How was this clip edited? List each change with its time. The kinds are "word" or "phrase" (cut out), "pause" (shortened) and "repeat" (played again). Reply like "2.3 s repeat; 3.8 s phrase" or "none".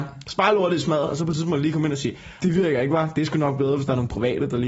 2.4 s word